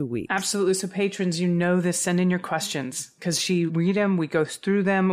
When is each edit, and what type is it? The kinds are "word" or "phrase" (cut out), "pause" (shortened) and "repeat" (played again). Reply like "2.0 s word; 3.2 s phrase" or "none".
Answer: 3.7 s word